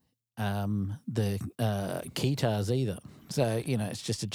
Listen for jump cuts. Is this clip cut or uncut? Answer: cut